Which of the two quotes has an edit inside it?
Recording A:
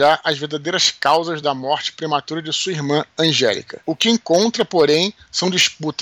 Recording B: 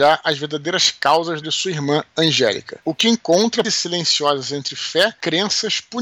B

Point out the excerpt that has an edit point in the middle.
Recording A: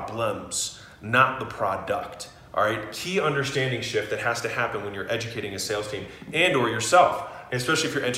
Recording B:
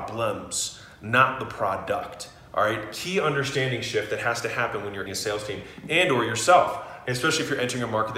B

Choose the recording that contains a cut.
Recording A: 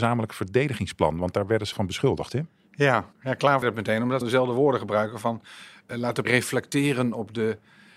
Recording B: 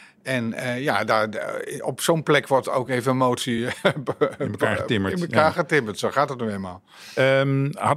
A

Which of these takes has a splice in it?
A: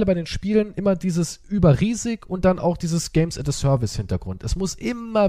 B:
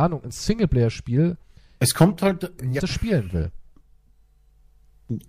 B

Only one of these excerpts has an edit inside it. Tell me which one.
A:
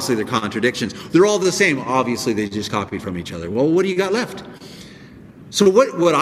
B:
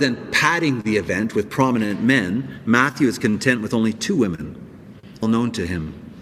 B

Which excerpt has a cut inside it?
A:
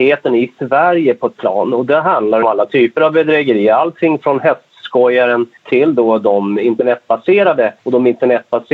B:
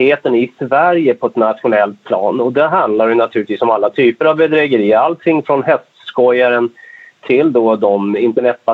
A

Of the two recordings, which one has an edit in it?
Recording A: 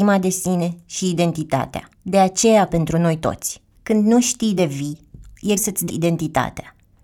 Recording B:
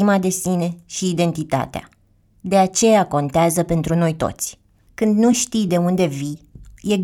A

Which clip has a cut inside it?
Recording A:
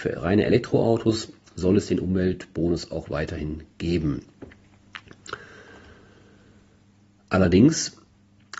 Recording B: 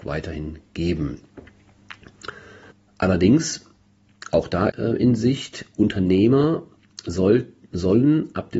B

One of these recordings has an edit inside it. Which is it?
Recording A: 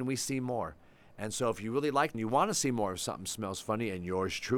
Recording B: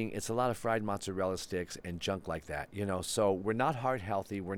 A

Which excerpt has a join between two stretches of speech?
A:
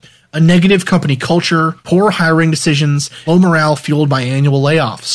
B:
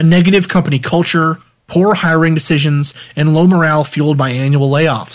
A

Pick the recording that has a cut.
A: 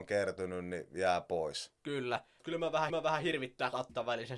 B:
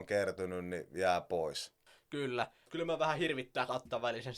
A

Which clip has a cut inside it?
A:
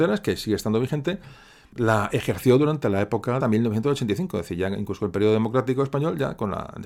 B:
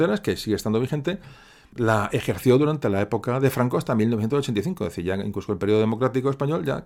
A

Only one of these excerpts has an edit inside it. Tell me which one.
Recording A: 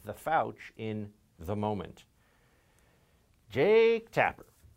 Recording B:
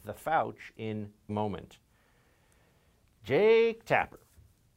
B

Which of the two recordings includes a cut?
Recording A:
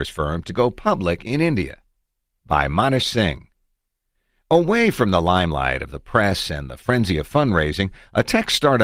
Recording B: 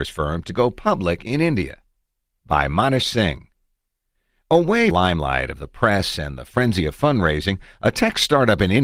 B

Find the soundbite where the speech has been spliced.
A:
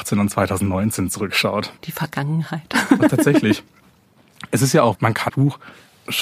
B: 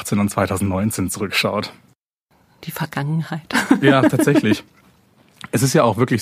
A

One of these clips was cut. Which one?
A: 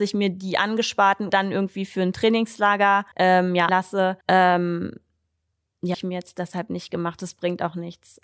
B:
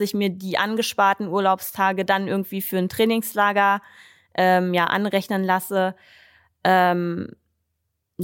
A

